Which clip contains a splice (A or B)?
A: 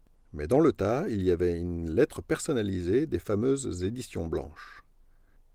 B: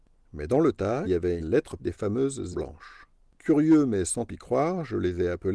B